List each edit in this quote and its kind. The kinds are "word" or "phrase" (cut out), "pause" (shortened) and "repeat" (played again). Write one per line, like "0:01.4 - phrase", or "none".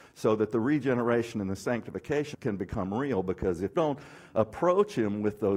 0:02.3 - word
0:03.7 - word